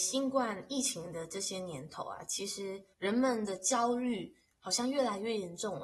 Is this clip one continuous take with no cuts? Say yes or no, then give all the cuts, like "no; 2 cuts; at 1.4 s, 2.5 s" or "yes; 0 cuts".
no; 1 cut; at 2.9 s